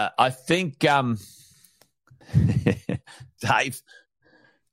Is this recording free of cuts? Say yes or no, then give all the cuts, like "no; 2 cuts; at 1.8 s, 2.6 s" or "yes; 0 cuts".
no; 1 cut; at 3.4 s